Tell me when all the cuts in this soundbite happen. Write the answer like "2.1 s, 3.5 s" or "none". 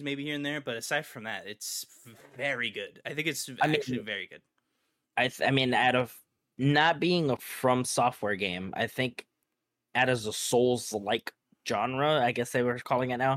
7.4 s